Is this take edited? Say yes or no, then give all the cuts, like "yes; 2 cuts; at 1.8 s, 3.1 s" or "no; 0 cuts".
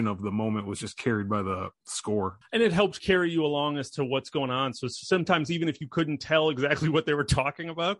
yes; 1 cut; at 2.4 s